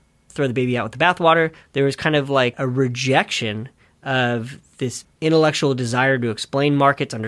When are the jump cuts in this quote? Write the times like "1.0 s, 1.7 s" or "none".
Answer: 2.5 s, 5.1 s